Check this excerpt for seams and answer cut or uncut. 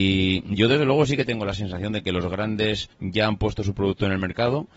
cut